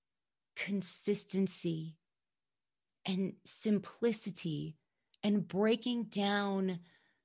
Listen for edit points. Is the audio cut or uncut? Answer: uncut